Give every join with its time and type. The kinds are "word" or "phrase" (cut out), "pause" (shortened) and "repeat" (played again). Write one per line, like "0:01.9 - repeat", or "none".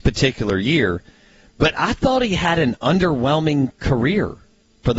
none

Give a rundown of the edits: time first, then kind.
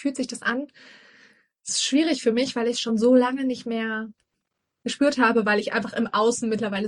none

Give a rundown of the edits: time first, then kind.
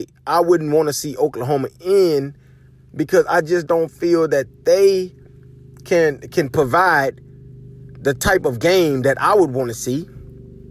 none

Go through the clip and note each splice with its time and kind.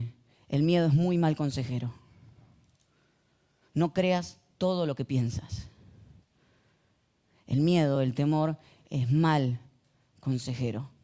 none

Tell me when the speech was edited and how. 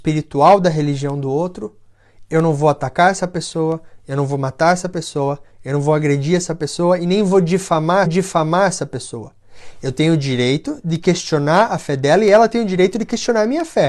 0:08.1 - repeat

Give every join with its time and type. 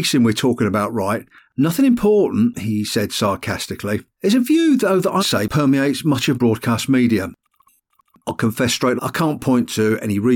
0:04.1 - pause
0:05.2 - word
0:06.3 - word
0:09.0 - word

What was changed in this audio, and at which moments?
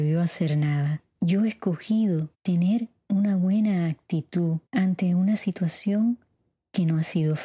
0:01.1 - pause
0:02.3 - pause
0:04.7 - pause

